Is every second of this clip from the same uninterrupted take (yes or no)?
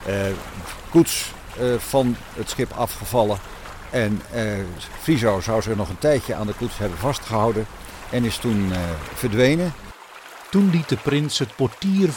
yes